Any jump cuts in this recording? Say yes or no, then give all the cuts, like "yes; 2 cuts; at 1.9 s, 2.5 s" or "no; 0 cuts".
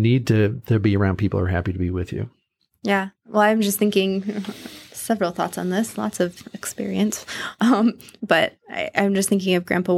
no; 0 cuts